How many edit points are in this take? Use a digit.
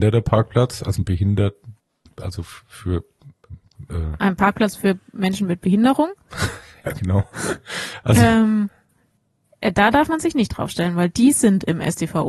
0